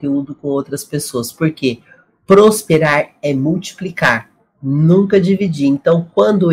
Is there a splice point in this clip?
no; 0 cuts

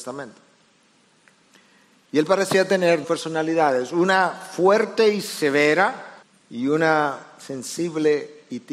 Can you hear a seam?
yes; 2 cuts; at 3.0 s, 6.2 s

